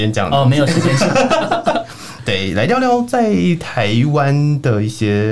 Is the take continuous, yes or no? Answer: yes